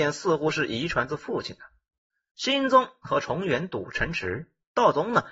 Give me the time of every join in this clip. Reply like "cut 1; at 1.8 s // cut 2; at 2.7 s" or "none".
none